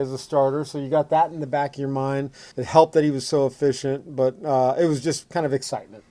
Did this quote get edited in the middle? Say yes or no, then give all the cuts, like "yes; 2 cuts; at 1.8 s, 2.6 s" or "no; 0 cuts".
yes; 1 cut; at 2.5 s